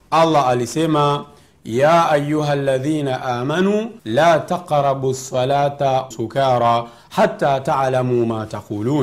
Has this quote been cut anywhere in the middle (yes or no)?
yes